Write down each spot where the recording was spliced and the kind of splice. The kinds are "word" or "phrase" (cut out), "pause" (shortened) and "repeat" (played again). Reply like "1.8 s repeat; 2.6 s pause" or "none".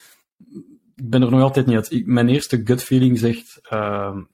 none